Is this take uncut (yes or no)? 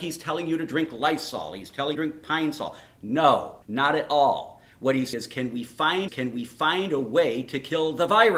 no